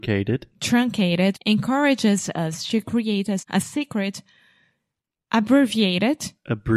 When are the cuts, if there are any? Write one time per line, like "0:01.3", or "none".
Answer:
0:01.3
0:03.4